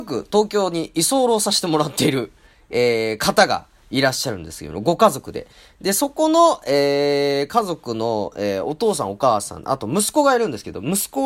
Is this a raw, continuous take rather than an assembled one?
yes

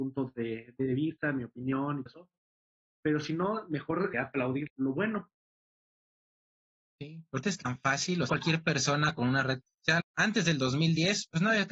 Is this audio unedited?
no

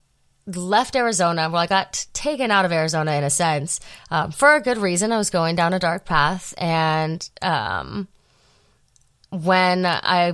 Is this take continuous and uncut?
yes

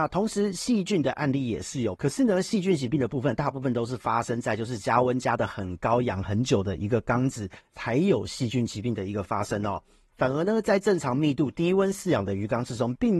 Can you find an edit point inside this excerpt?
no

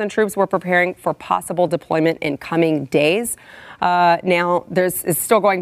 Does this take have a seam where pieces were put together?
no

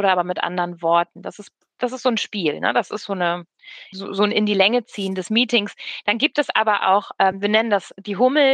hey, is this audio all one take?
no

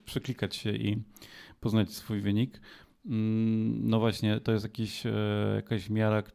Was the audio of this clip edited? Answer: no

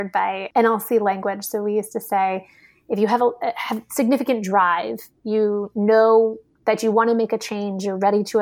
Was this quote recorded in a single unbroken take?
yes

